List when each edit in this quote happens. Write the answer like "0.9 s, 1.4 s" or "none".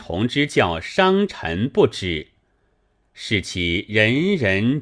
none